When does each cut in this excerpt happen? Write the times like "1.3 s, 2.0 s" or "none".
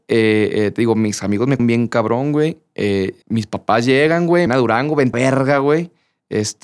1.6 s, 3.2 s, 4.5 s, 5.1 s